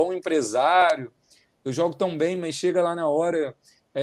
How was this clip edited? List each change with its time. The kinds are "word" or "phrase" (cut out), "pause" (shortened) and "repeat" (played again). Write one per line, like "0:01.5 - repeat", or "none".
none